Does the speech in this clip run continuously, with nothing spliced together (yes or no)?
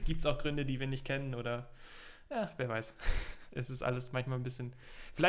yes